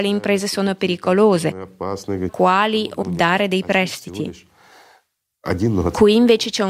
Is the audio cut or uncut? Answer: cut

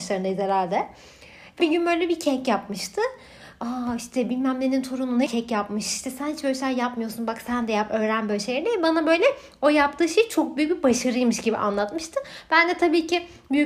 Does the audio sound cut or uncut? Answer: cut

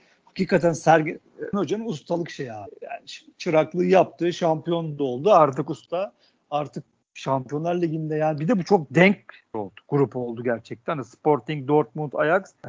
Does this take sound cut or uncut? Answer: cut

